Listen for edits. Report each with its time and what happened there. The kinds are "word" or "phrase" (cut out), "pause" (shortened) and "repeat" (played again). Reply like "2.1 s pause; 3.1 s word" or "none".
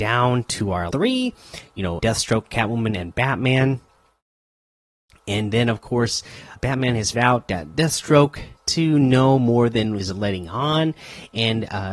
0.9 s word; 2.0 s word; 6.6 s word; 7.1 s word; 8.6 s word; 10.0 s word